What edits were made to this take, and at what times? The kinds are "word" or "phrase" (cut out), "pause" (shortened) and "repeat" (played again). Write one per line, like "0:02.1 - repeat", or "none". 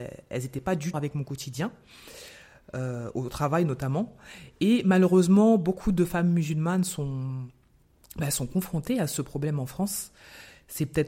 0:00.9 - phrase